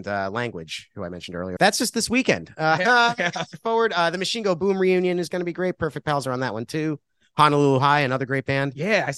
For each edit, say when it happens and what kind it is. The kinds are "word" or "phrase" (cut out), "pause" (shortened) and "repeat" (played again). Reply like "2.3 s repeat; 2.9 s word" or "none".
1.6 s phrase